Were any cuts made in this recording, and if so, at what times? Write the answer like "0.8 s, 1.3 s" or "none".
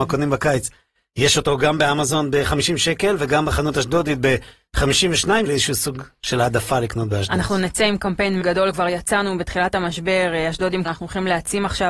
5.5 s, 8.4 s, 10.9 s

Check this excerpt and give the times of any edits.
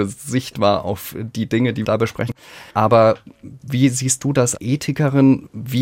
1.8 s, 2.7 s, 4.6 s

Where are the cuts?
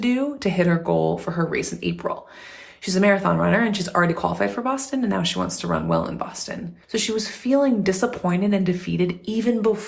6.8 s

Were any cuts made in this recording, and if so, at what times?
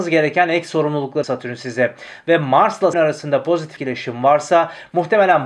1.2 s, 2.9 s, 3.8 s

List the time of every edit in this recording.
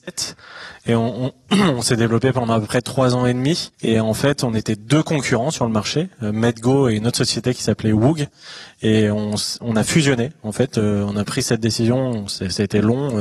3.7 s

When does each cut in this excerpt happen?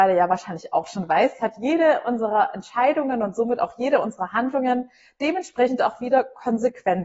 none

